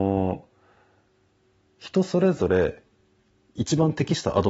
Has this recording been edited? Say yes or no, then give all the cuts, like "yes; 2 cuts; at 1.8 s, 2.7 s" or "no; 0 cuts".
no; 0 cuts